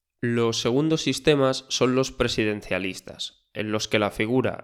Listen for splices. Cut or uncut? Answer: uncut